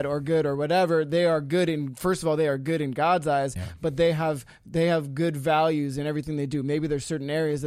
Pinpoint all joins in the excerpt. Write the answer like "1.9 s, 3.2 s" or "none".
none